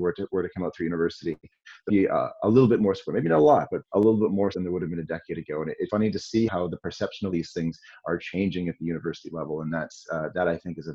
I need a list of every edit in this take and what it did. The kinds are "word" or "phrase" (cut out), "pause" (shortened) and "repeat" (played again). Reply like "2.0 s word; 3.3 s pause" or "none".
1.9 s word; 3.8 s word; 4.5 s word; 5.9 s word; 6.5 s word; 7.3 s word